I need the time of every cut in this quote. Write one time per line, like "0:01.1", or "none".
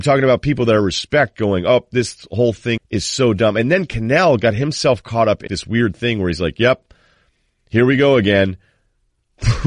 0:02.8
0:05.5